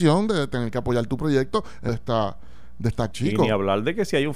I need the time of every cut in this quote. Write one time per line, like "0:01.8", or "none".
0:01.9
0:03.1